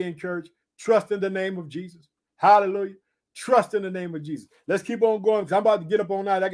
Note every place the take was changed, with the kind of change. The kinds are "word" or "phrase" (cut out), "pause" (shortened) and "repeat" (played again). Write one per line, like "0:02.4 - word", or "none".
none